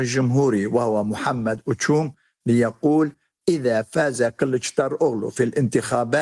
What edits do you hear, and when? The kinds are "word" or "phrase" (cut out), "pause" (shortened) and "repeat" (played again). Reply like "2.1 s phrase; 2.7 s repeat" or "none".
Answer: none

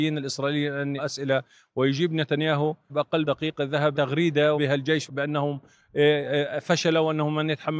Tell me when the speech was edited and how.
1.0 s word; 2.9 s word; 3.2 s word; 3.9 s word; 4.5 s word; 5.1 s word

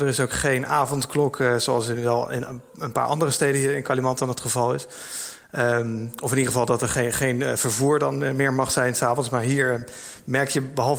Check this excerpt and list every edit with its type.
2.7 s pause

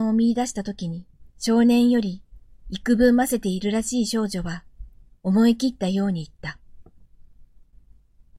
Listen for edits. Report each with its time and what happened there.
1.3 s pause

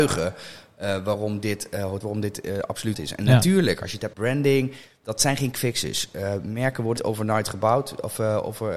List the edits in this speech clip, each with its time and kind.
2.0 s word; 2.9 s word; 4.1 s word; 5.5 s word; 7.0 s word

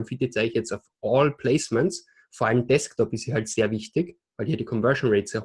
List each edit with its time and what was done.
none

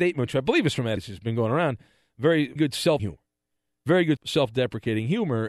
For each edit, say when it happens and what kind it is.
1.0 s word; 2.6 s word; 3.0 s word; 4.2 s word

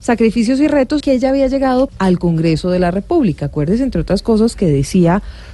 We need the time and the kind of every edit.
1.0 s word; 1.9 s phrase

